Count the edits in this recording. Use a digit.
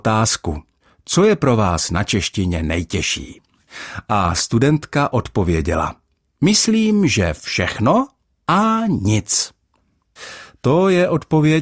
0